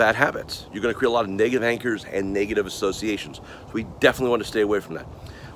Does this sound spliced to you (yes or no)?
no